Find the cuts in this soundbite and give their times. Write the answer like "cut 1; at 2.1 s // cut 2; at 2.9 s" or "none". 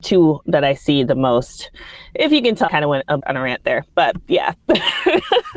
cut 1; at 2.7 s // cut 2; at 3.2 s